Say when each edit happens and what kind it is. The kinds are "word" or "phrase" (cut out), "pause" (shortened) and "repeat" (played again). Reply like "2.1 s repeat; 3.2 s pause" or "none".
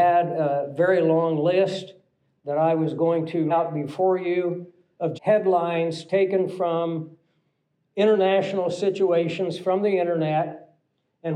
3.5 s word; 5.1 s word